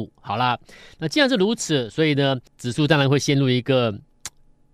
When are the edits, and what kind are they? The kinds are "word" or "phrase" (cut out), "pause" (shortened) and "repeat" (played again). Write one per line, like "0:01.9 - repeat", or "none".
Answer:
0:02.5 - pause